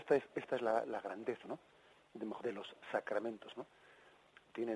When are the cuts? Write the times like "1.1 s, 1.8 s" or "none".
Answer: 1.4 s, 2.4 s, 3.5 s